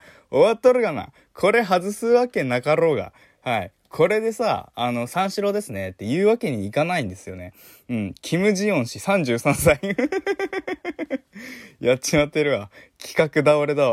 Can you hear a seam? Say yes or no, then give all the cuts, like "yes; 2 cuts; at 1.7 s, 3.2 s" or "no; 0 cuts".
no; 0 cuts